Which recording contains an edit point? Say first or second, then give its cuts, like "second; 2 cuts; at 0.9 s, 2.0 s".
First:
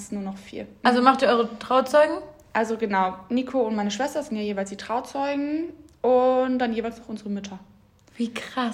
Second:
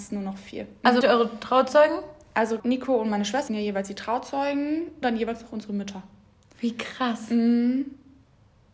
second; 4 cuts; at 1.0 s, 2.6 s, 3.5 s, 5.0 s